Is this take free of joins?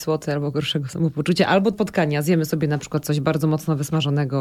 no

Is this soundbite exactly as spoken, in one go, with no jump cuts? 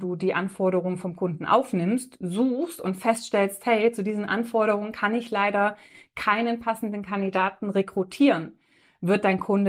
yes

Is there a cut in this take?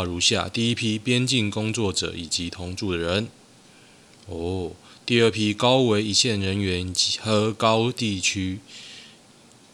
no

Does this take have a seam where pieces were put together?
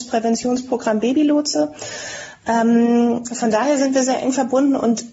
no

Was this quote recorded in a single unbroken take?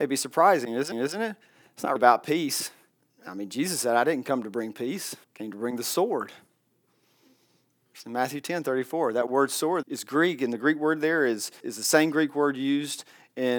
no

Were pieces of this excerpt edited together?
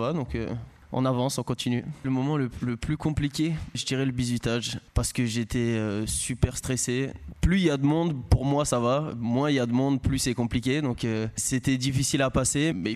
no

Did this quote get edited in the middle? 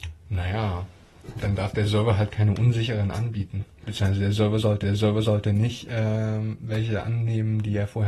yes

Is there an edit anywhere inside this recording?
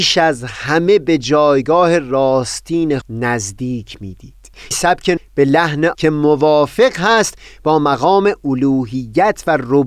yes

